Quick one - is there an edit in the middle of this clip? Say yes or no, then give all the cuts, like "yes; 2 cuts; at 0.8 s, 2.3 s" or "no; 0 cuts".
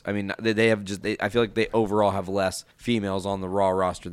yes; 1 cut; at 2.7 s